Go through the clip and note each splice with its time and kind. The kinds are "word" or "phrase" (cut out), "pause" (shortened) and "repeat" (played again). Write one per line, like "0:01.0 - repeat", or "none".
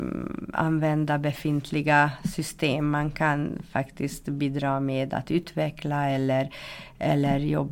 none

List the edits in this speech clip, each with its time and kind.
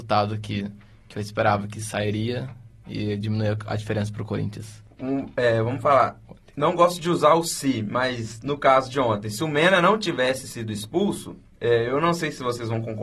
none

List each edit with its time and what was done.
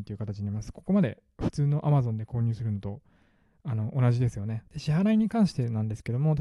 0:04.7 - pause

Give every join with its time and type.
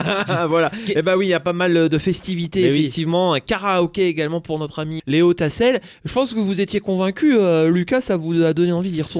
0:05.0 - word

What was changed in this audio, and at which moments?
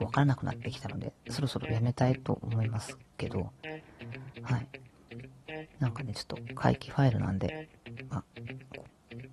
0:04.3 - pause

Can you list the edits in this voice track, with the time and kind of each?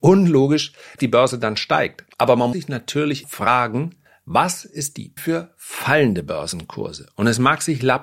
0:01.0 - word
0:02.1 - pause
0:02.5 - word
0:03.2 - word
0:04.1 - pause
0:05.2 - phrase

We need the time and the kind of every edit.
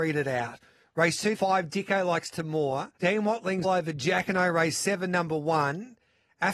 0:01.3 - word
0:03.0 - pause
0:03.6 - word

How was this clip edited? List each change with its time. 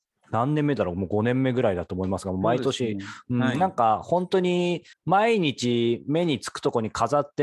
0:04.9 - pause

